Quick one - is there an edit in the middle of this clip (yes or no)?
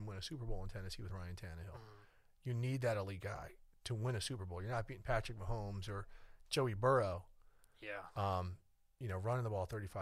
no